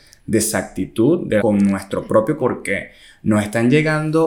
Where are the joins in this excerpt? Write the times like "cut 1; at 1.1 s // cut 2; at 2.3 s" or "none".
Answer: cut 1; at 1.4 s // cut 2; at 2.4 s

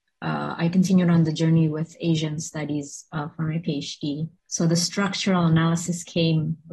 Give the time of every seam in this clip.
cut 1; at 4.4 s

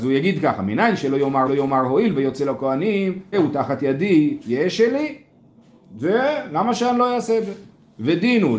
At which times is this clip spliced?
cut 1; at 1.5 s // cut 2; at 3.3 s

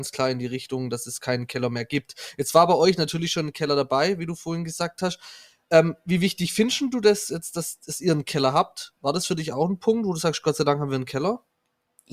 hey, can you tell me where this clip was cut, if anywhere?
none

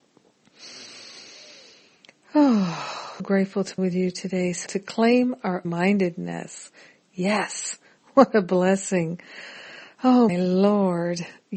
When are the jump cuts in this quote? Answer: cut 1; at 3.2 s // cut 2; at 3.8 s // cut 3; at 4.7 s // cut 4; at 5.6 s // cut 5; at 10.3 s

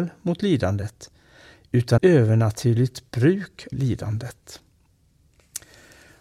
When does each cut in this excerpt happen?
cut 1; at 2.0 s // cut 2; at 3.7 s

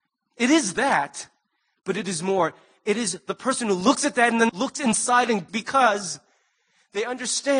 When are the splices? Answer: cut 1; at 4.5 s // cut 2; at 5.5 s

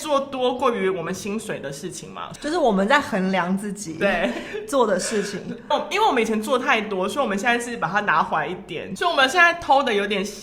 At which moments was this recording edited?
cut 1; at 5.7 s

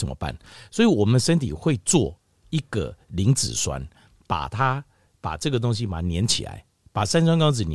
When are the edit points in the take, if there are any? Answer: none

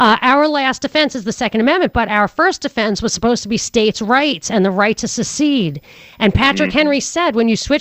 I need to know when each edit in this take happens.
none

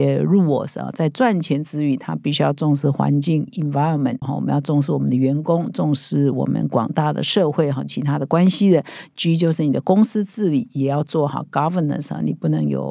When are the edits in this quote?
cut 1; at 3.5 s // cut 2; at 4.2 s

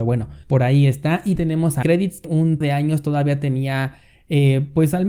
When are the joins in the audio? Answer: cut 1; at 1.4 s // cut 2; at 1.8 s // cut 3; at 2.2 s // cut 4; at 2.6 s

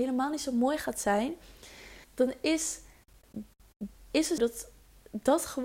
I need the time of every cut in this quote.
cut 1; at 2.0 s // cut 2; at 3.9 s // cut 3; at 4.4 s

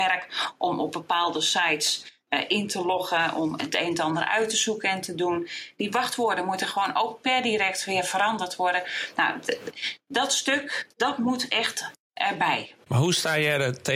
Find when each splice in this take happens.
cut 1; at 10.9 s // cut 2; at 12.0 s

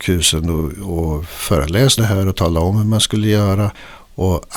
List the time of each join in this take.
cut 1; at 2.0 s

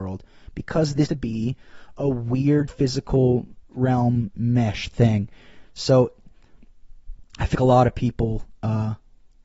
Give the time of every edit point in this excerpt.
cut 1; at 1.1 s // cut 2; at 2.7 s // cut 3; at 7.5 s

